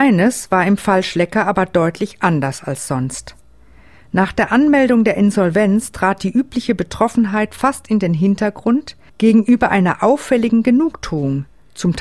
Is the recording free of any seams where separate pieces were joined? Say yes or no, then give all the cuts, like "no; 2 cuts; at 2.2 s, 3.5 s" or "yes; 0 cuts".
no; 1 cut; at 9.1 s